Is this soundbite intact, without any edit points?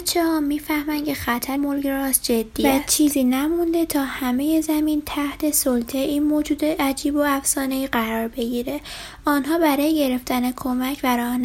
no; 1 cut; at 1.6 s

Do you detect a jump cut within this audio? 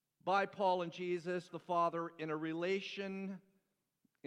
yes; 1 cut; at 1.5 s

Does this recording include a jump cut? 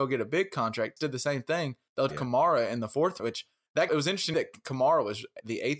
yes; 5 cuts; at 1.0 s, 2.1 s, 3.2 s, 3.9 s, 4.3 s

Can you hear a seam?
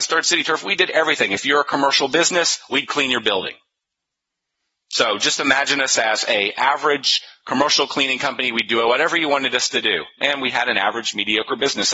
no; 0 cuts

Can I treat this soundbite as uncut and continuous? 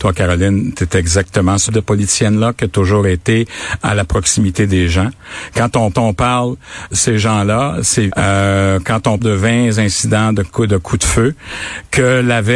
no; 5 cuts; at 1.7 s, 5.9 s, 6.9 s, 8.1 s, 9.2 s

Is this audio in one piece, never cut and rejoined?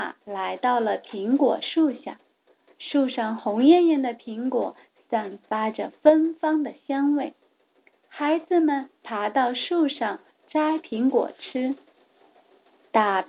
yes; 0 cuts

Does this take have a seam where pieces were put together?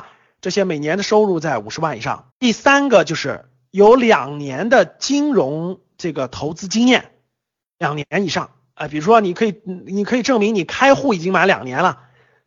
yes; 1 cut; at 2.3 s

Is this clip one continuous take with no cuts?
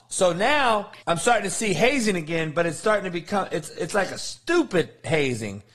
no; 1 cut; at 1.0 s

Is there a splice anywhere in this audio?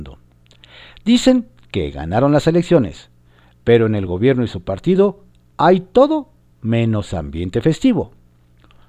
no; 0 cuts

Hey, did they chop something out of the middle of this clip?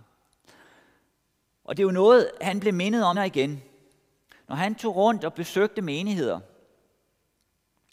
yes; 1 cut; at 3.1 s

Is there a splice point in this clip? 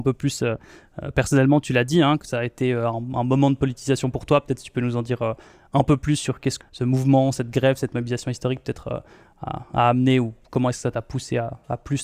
yes; 1 cut; at 6.6 s

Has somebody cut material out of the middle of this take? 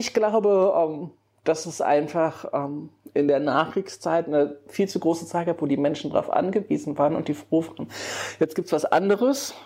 no; 0 cuts

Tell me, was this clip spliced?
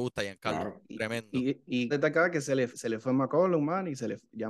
yes; 2 cuts; at 1.9 s, 2.7 s

